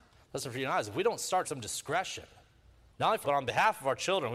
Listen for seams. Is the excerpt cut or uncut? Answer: cut